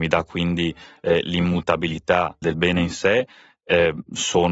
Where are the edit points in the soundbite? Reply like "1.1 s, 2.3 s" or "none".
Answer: 2.4 s